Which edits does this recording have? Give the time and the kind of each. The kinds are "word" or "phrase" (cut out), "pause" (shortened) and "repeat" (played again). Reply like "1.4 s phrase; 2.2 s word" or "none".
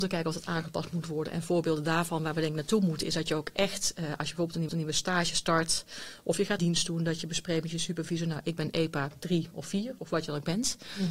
4.7 s repeat; 6.6 s word; 10.0 s word